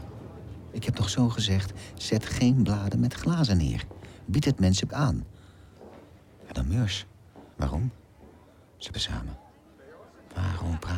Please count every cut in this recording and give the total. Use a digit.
4